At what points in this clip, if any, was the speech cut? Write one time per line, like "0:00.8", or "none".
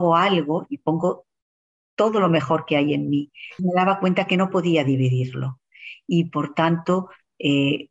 0:03.6